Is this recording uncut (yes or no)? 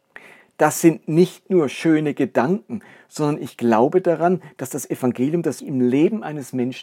no